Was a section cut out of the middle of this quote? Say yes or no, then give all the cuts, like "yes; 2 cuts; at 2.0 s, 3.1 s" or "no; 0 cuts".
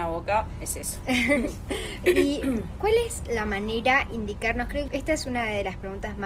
yes; 2 cuts; at 2.0 s, 4.9 s